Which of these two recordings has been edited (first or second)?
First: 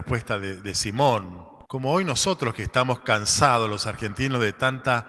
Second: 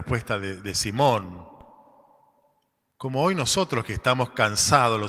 first